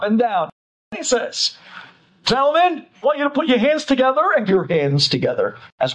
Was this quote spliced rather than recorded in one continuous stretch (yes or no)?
yes